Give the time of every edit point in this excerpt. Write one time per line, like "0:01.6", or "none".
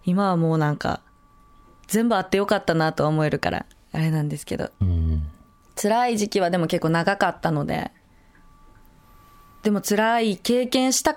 none